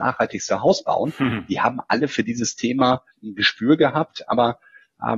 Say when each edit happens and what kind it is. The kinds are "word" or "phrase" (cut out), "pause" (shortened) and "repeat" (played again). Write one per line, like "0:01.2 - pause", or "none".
0:03.1 - pause